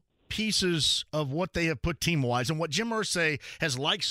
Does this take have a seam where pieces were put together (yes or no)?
yes